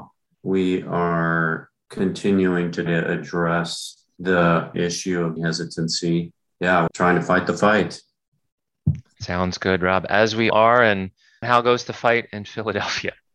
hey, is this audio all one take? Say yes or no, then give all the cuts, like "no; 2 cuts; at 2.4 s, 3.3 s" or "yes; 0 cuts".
no; 6 cuts; at 2.9 s, 4.7 s, 5.4 s, 6.9 s, 10.5 s, 11.4 s